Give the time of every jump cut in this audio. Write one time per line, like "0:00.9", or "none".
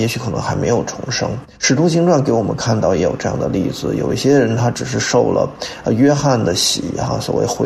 0:01.5